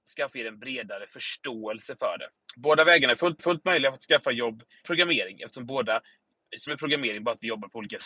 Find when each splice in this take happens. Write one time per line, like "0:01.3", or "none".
0:02.4
0:03.4
0:04.8
0:06.7